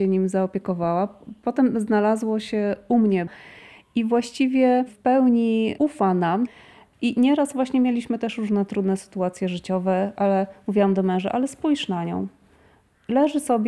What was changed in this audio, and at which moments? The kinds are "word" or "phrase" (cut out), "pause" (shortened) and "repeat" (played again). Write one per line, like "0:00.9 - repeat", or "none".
none